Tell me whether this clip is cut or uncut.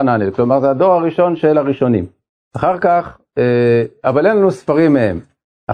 uncut